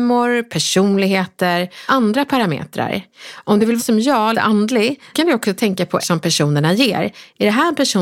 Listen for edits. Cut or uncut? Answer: cut